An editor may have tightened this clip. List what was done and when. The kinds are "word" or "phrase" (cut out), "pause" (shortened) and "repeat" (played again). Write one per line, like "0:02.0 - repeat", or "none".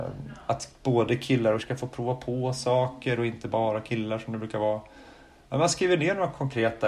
0:01.6 - word